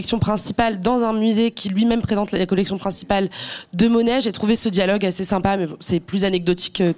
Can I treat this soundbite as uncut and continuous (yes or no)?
yes